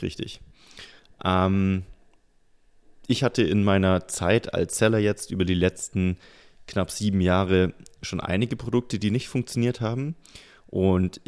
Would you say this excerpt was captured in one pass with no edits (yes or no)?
yes